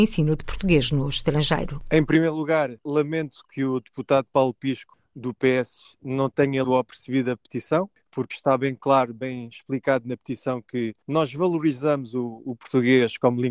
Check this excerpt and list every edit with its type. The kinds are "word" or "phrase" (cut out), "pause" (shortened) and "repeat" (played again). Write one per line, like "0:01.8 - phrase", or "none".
0:06.6 - word